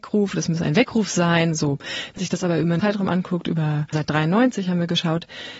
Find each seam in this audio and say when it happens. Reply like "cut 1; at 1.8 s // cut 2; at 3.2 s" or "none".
cut 1; at 2.2 s // cut 2; at 2.8 s // cut 3; at 3.9 s